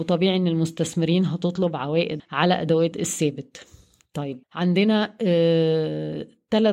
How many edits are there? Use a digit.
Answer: 3